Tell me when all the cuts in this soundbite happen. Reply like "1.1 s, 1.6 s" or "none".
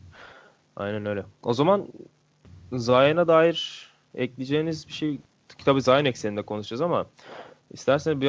none

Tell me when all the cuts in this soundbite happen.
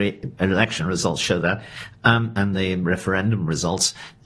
none

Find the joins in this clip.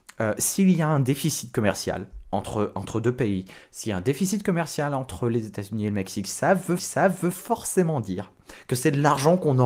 6.8 s

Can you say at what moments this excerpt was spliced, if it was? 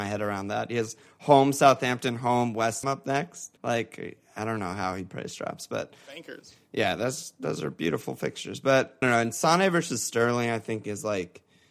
2.8 s, 3.6 s, 9.0 s

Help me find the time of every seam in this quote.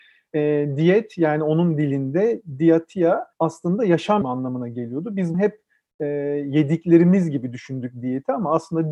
3.3 s, 4.2 s, 5.3 s

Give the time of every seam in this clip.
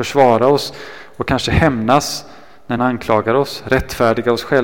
2.8 s

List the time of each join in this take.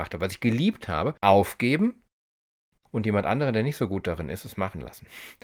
none

